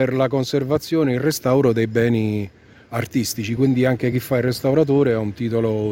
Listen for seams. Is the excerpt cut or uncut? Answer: uncut